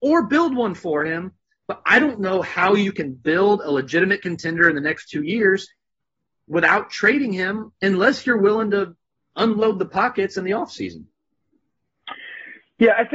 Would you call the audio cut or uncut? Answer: uncut